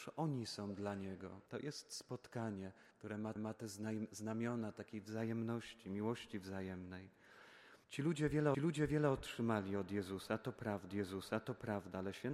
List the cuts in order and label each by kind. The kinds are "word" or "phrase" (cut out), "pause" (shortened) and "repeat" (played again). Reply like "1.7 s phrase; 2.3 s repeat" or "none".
1.5 s pause; 2.9 s pause; 3.4 s repeat; 7.8 s pause; 8.5 s repeat; 10.9 s repeat